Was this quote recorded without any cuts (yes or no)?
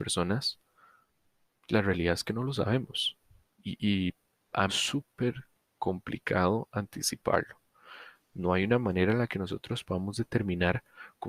no